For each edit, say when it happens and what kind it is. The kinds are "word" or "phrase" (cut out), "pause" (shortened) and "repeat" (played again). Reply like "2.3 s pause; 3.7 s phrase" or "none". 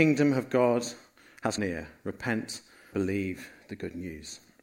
1.6 s word; 2.9 s word